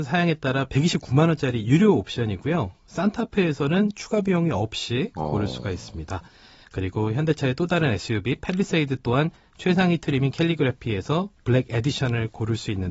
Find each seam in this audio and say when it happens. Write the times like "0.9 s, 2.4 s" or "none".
none